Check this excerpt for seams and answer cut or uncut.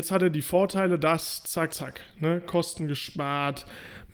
cut